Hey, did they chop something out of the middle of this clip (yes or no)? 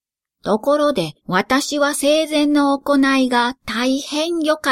yes